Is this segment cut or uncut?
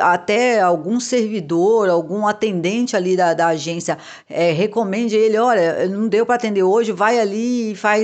uncut